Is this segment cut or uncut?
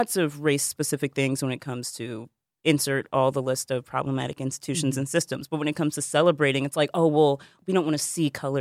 uncut